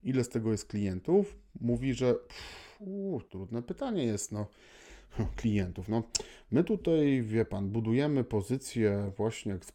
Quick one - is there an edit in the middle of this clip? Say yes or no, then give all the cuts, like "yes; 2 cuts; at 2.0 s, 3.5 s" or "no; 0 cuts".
yes; 1 cut; at 3.3 s